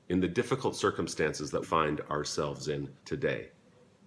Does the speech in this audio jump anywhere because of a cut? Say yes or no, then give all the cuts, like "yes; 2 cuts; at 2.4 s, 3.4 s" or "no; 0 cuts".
yes; 2 cuts; at 1.6 s, 3.0 s